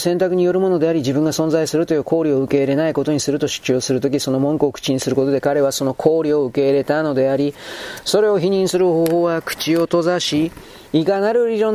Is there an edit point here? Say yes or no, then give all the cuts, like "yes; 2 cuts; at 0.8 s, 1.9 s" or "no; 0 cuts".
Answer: yes; 1 cut; at 10.9 s